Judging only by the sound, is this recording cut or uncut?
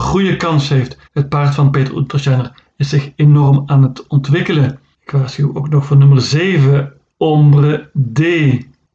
cut